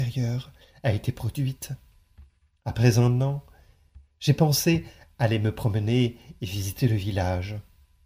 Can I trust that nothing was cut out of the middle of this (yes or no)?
yes